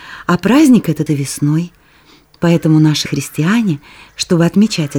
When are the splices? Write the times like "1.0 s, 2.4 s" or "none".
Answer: 1.1 s, 3.1 s